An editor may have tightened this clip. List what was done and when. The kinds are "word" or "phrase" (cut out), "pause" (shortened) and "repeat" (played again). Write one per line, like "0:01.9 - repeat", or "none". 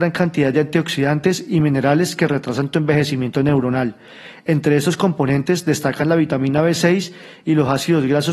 none